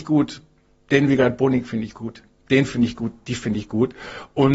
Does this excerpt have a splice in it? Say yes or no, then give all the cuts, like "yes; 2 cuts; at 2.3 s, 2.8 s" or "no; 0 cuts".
no; 0 cuts